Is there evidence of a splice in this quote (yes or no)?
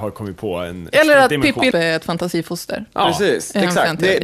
yes